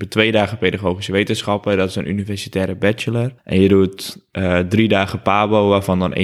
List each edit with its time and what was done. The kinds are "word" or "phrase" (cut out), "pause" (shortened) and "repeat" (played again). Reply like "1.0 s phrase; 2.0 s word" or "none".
3.4 s pause